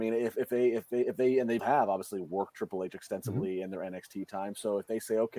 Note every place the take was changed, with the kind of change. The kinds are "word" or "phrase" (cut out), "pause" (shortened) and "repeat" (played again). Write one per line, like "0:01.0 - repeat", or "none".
0:01.6 - word
0:02.5 - word